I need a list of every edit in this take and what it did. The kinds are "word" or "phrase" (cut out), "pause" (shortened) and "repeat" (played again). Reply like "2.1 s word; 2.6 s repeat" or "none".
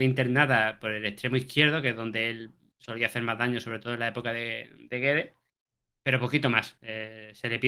5.9 s pause

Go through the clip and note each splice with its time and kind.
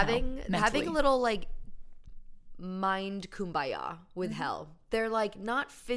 none

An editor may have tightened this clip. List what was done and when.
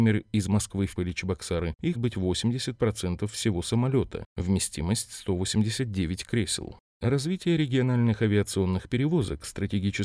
1.0 s word; 1.9 s word

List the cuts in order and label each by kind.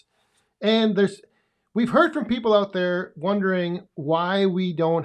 none

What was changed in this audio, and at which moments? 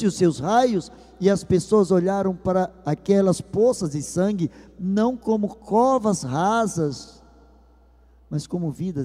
none

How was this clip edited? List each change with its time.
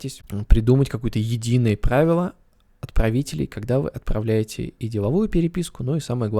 none

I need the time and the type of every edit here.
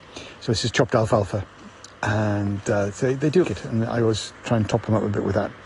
3.4 s word

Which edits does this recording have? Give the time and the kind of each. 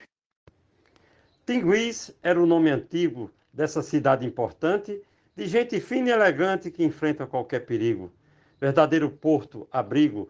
none

